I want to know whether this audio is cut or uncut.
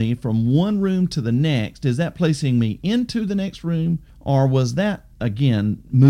cut